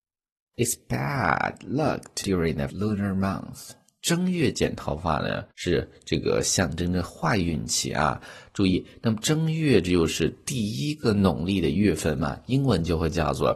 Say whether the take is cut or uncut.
cut